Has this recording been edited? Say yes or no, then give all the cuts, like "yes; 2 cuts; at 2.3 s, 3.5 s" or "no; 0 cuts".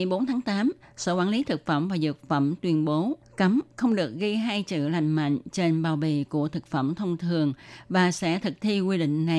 yes; 1 cut; at 3.2 s